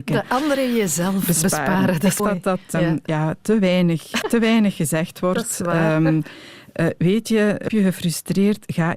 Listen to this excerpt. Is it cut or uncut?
cut